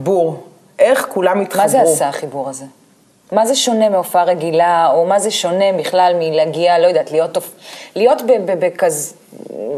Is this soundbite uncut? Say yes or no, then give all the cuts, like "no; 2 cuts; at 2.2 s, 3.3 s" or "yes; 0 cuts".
yes; 0 cuts